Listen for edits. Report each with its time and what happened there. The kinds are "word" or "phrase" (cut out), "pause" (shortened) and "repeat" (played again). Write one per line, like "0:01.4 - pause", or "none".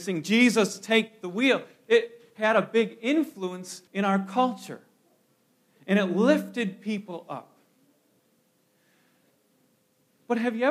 0:03.9 - pause